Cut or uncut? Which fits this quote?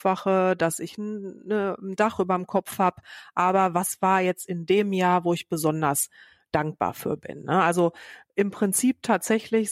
uncut